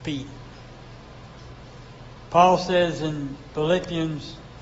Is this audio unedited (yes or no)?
yes